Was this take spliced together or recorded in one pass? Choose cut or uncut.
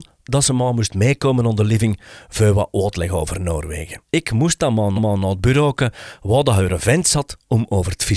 cut